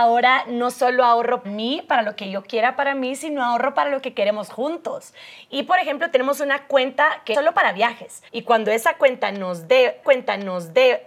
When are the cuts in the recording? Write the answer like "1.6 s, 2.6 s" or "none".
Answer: 1.4 s, 7.3 s, 8.3 s, 10.0 s